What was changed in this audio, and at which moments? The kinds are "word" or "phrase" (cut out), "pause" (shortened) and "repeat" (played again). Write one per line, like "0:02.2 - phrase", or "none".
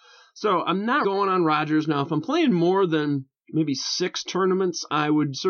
0:01.0 - word